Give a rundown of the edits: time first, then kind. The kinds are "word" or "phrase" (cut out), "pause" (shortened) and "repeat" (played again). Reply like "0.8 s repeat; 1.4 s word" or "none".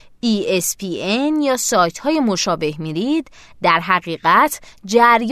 none